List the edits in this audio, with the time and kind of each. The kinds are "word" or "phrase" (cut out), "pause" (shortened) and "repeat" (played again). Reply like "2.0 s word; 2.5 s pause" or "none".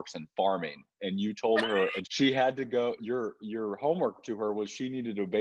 2.0 s word; 3.0 s word